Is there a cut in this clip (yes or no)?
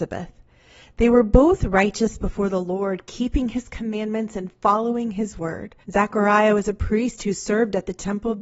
yes